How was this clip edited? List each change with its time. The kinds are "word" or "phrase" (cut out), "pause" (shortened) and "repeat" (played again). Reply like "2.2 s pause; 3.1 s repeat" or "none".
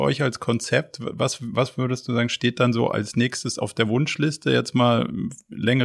none